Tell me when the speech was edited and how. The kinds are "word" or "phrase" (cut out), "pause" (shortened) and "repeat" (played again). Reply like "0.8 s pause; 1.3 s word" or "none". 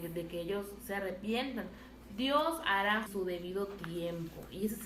3.1 s phrase